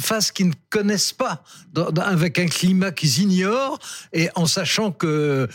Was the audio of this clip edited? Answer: no; 0 cuts

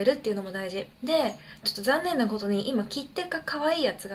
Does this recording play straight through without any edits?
no; 1 cut; at 0.9 s

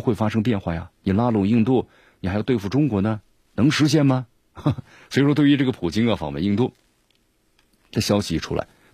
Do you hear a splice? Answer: no; 0 cuts

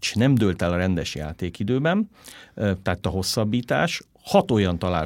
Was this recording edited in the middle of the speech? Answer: yes; 1 cut; at 3.0 s

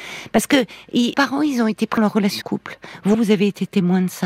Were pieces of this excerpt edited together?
yes; 4 cuts; at 1.1 s, 2.0 s, 2.4 s, 3.1 s

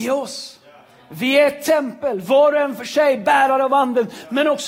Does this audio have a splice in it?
no; 0 cuts

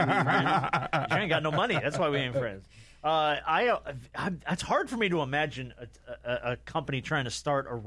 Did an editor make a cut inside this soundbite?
no; 0 cuts

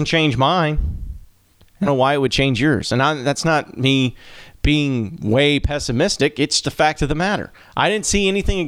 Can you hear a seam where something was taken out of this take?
yes; 3 cuts; at 1.5 s, 1.9 s, 6.6 s

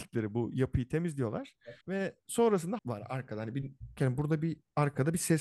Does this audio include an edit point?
yes; 3 cuts; at 1.8 s, 2.8 s, 4.0 s

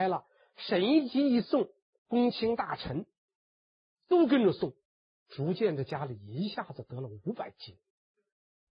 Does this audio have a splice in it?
no; 0 cuts

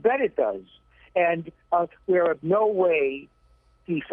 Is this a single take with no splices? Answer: no; 1 cut; at 2.4 s

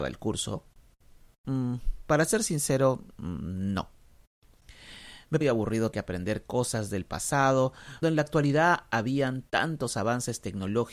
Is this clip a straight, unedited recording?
no; 3 cuts; at 5.4 s, 5.9 s, 8.0 s

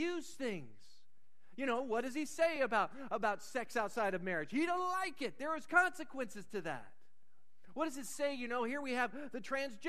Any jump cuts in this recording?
no; 0 cuts

